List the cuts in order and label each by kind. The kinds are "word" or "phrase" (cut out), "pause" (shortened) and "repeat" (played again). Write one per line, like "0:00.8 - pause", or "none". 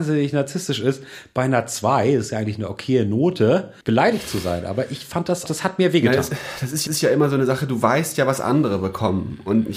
0:03.8 - pause
0:05.5 - word
0:06.9 - repeat